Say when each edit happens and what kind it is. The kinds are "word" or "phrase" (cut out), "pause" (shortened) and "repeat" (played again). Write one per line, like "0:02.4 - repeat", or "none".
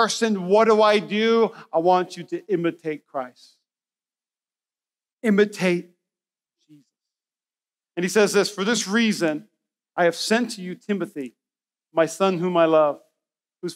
none